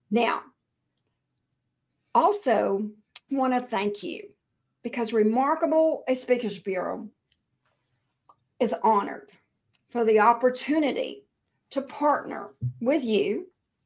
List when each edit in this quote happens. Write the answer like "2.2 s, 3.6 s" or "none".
3.3 s